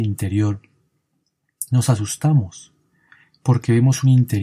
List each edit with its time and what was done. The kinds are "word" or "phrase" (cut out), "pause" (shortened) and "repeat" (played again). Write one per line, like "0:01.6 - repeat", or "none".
none